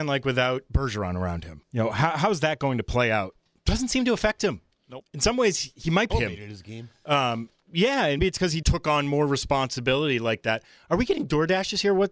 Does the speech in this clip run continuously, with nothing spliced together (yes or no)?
no